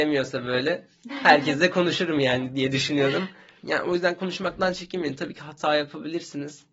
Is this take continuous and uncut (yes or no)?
yes